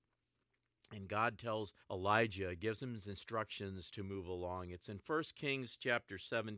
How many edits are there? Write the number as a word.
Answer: one